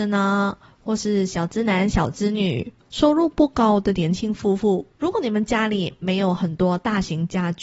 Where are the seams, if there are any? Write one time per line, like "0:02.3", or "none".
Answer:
0:04.9